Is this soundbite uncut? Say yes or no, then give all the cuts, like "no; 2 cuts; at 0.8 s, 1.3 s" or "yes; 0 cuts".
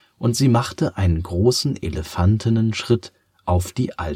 yes; 0 cuts